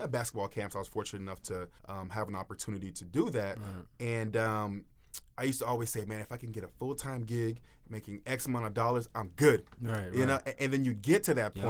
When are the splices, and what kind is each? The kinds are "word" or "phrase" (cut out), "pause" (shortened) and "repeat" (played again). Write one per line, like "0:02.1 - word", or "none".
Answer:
0:01.8 - pause
0:05.3 - pause

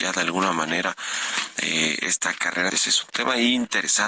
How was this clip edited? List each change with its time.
0:02.7 - phrase

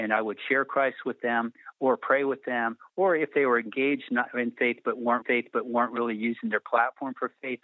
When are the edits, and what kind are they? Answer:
0:05.2 - repeat

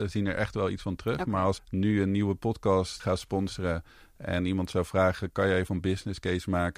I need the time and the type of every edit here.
0:01.6 - word
0:03.0 - word
0:05.7 - word

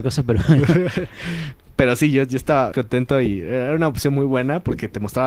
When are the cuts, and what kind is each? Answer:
0:02.7 - word

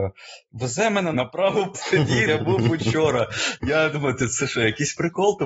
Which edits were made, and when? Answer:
0:01.1 - word
0:01.7 - word
0:02.3 - word
0:03.9 - word

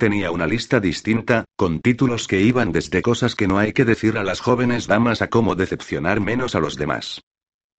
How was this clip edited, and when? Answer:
none

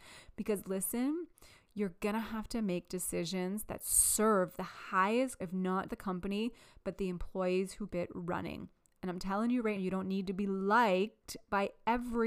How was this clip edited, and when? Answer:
0:05.4 - word
0:05.9 - word
0:07.9 - word
0:09.8 - word

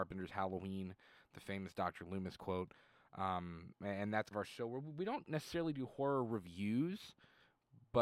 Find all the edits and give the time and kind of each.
0:04.3 - word

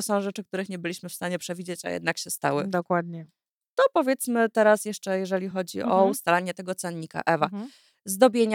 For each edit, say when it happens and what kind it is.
none

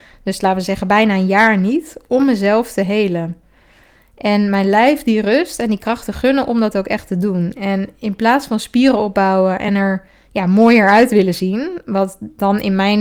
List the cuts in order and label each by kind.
none

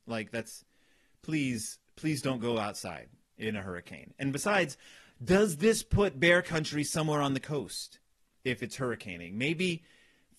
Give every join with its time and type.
none

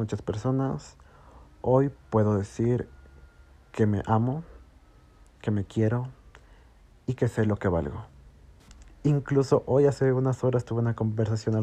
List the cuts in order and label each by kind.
none

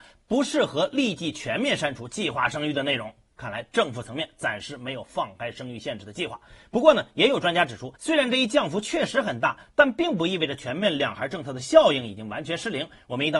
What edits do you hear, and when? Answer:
0:08.0 - pause

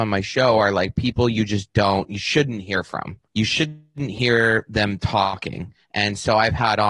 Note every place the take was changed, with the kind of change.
0:03.3 - pause
0:05.8 - pause

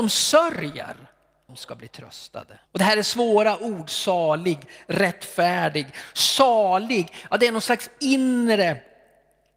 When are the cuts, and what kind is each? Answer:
0:01.5 - word
0:02.7 - pause

